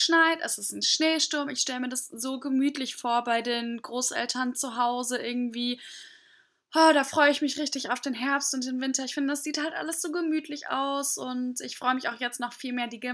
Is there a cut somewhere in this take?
no; 0 cuts

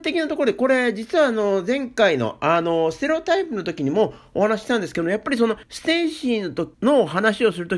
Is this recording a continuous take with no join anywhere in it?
no; 2 cuts; at 5.6 s, 6.7 s

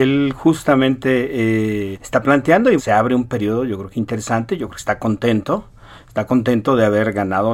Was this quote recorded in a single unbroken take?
no; 2 cuts; at 1.9 s, 2.8 s

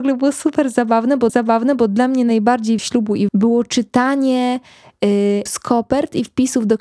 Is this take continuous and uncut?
no; 4 cuts; at 1.3 s, 2.8 s, 3.3 s, 5.5 s

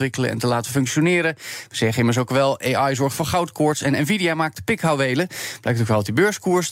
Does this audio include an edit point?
no; 0 cuts

